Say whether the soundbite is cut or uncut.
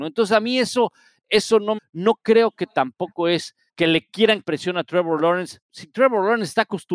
cut